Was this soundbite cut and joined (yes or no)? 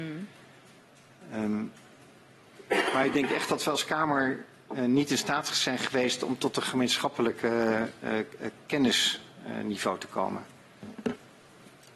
no